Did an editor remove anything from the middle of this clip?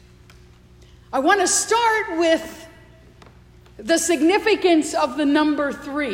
no; 0 cuts

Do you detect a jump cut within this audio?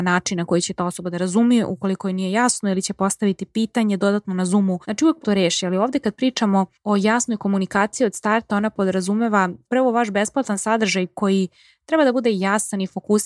yes; 2 cuts; at 4.8 s, 5.2 s

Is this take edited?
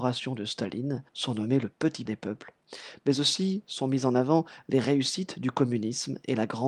yes; 2 cuts; at 1.1 s, 2.1 s

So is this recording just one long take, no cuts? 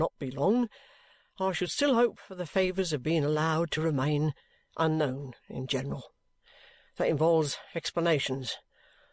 yes; 0 cuts

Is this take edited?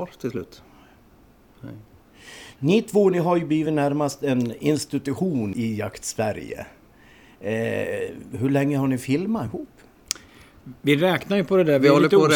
no; 0 cuts

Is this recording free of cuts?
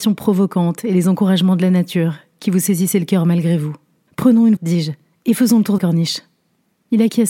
no; 3 cuts; at 4.1 s, 4.6 s, 5.8 s

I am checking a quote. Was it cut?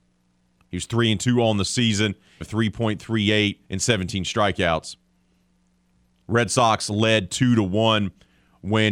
yes; 2 cuts; at 2.4 s, 3.6 s

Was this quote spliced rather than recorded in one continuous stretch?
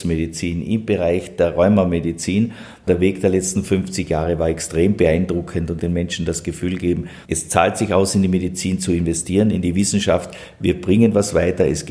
yes; 2 cuts; at 5.8 s, 7.2 s

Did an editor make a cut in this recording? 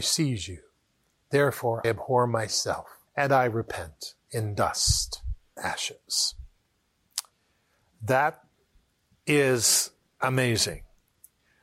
yes; 4 cuts; at 1.8 s, 3.1 s, 4.2 s, 5.6 s

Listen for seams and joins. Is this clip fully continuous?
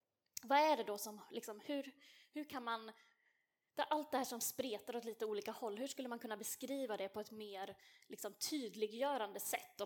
yes; 0 cuts

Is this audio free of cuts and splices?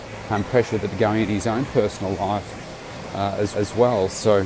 no; 1 cut; at 3.5 s

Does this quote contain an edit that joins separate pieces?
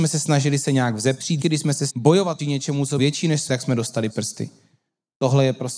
yes; 6 cuts; at 1.4 s, 1.9 s, 2.4 s, 3.0 s, 3.5 s, 4.1 s

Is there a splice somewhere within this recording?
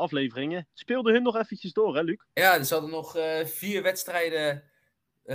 yes; 1 cut; at 2.3 s

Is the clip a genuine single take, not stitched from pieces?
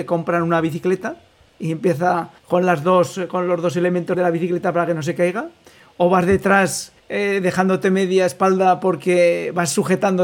no; 3 cuts; at 2.4 s, 4.1 s, 7.0 s

